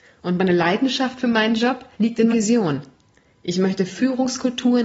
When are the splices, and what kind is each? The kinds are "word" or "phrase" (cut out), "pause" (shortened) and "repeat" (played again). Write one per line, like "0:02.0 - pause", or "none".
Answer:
0:01.9 - pause
0:02.3 - word